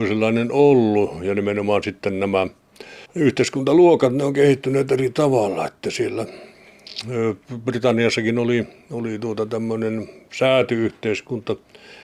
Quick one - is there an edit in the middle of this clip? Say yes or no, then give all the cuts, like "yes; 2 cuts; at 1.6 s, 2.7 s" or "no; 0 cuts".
yes; 2 cuts; at 3.1 s, 7.4 s